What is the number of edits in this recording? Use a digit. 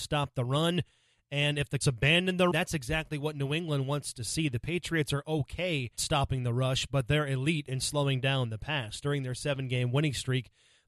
3